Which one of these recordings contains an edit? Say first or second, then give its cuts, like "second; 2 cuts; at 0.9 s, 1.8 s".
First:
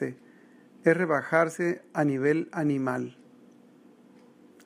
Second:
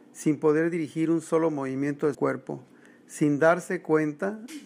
second; 1 cut; at 2.1 s